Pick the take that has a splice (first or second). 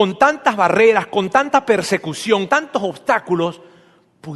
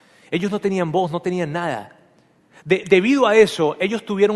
first